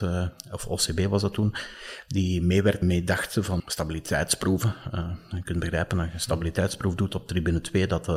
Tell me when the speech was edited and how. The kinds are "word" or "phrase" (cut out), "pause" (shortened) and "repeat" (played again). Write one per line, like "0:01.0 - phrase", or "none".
0:02.8 - word
0:03.6 - word